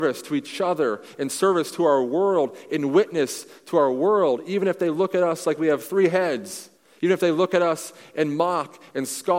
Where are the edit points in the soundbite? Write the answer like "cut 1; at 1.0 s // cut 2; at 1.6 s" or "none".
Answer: cut 1; at 6.8 s